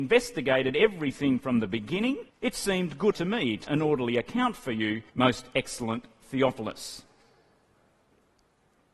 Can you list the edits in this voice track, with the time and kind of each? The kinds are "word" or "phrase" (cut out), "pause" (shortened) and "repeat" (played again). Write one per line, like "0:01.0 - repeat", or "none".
0:02.3 - pause
0:03.1 - word
0:03.6 - word
0:05.1 - pause